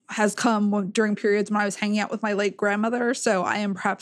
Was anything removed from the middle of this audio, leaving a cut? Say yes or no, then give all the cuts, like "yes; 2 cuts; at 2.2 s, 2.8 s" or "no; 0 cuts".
no; 0 cuts